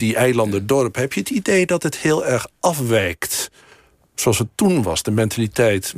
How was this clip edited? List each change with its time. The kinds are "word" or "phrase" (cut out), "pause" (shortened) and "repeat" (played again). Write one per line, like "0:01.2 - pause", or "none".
none